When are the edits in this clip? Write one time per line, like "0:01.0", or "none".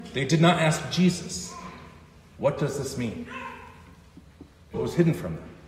0:04.7